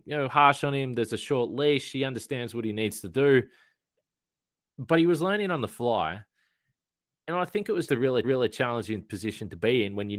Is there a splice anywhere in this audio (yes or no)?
yes